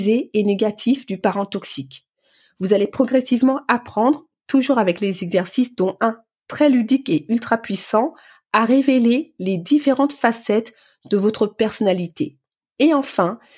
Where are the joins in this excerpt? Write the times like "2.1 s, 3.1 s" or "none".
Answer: none